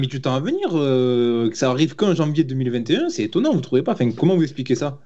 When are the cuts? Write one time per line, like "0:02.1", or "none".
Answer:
0:03.1